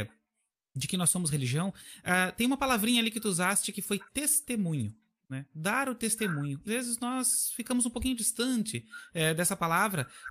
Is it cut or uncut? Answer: cut